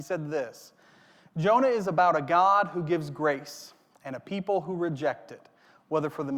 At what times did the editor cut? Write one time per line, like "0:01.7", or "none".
none